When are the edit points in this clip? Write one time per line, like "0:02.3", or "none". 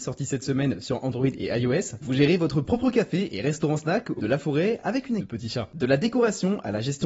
0:04.2
0:05.2